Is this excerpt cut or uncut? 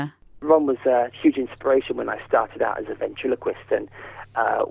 uncut